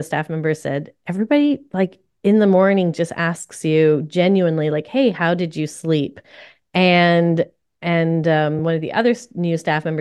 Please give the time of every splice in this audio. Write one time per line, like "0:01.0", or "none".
none